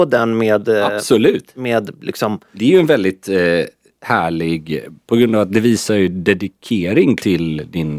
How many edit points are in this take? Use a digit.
0